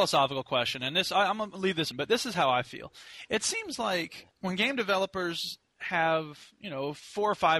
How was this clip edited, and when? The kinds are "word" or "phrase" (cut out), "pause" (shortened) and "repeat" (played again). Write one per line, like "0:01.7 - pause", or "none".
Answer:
0:01.9 - word
0:04.3 - pause